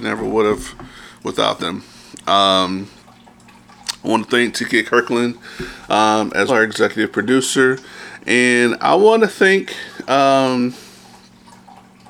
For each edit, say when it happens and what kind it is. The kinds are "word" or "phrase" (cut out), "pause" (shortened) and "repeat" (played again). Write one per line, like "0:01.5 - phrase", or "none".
0:06.5 - word